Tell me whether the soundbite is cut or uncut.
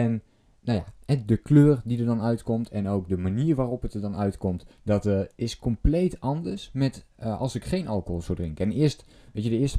cut